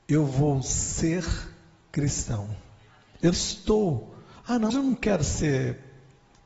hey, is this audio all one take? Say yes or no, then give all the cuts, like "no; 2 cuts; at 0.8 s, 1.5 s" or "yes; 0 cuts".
no; 2 cuts; at 3.3 s, 4.7 s